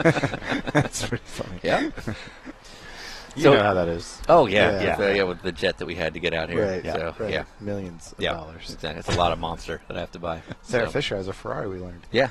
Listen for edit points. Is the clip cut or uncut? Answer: uncut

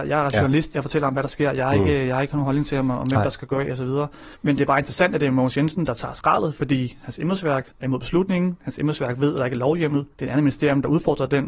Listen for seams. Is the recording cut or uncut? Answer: cut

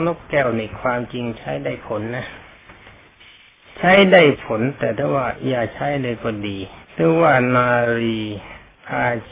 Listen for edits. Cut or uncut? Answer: cut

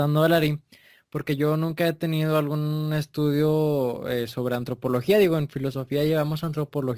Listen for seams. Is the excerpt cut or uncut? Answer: uncut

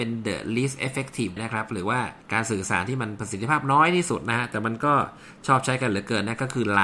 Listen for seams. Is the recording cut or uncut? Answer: cut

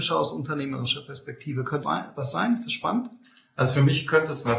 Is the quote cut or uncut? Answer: cut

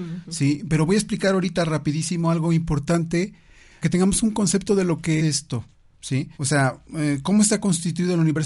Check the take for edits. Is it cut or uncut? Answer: cut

